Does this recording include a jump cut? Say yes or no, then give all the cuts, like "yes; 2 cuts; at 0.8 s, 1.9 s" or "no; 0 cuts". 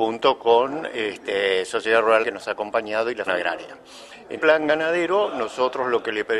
yes; 3 cuts; at 2.2 s, 3.3 s, 4.4 s